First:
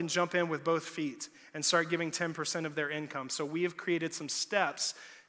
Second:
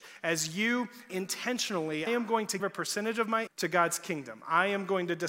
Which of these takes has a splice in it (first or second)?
second